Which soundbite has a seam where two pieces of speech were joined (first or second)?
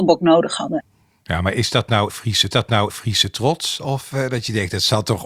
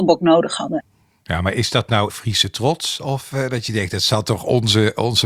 first